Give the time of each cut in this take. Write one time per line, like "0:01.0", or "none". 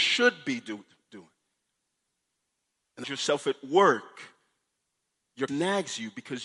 0:03.0
0:05.5

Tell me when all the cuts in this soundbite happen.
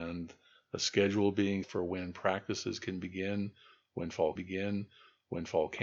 0:01.6
0:04.4

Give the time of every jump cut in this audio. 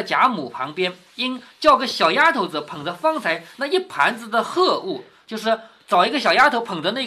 none

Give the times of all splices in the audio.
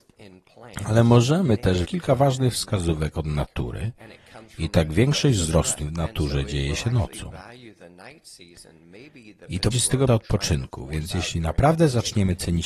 0:01.8
0:05.8
0:09.7
0:10.1

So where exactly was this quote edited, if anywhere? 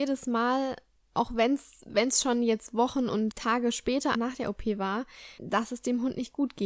0:03.3
0:04.1
0:05.4

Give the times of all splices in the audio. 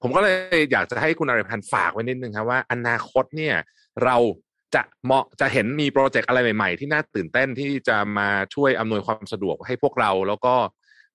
none

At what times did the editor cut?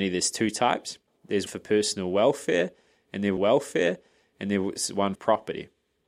0:01.5
0:03.4
0:05.1

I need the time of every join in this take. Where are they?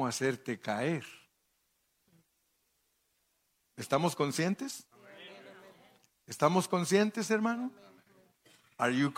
none

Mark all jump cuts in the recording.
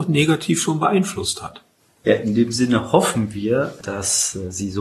0:01.8

